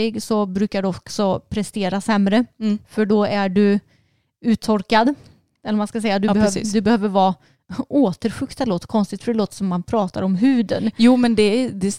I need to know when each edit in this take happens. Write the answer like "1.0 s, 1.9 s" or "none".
none